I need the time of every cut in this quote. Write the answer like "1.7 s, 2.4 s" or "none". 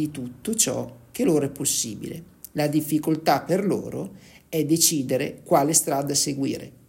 none